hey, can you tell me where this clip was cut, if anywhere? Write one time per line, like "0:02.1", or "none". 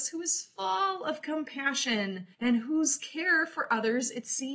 0:02.3